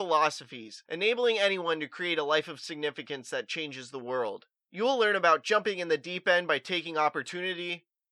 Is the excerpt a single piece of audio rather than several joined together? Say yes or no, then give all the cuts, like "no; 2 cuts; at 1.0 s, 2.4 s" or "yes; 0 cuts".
yes; 0 cuts